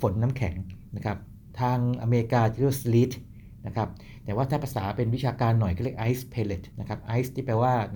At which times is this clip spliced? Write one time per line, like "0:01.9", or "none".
0:06.7